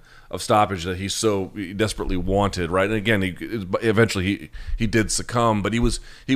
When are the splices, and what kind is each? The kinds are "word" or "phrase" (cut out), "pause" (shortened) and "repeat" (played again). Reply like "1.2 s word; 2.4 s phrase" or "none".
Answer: none